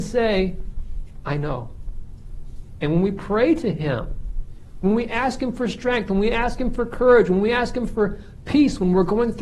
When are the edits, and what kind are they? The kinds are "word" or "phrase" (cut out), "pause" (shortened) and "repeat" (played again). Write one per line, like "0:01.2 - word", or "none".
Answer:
none